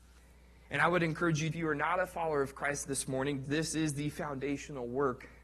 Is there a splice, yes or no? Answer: yes